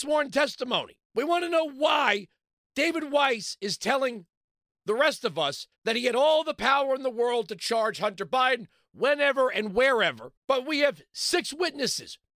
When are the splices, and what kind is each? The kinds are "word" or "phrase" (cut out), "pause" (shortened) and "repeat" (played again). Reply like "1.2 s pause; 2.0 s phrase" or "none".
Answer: 1.0 s pause; 5.8 s pause; 10.4 s pause